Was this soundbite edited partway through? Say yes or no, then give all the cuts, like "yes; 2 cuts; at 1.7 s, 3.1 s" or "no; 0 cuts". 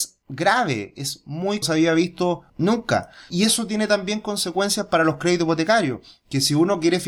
yes; 1 cut; at 1.6 s